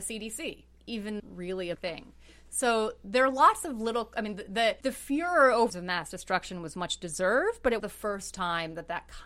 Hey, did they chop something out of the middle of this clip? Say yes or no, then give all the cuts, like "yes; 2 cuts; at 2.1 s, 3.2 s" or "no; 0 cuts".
yes; 5 cuts; at 1.2 s, 1.7 s, 4.8 s, 5.7 s, 7.8 s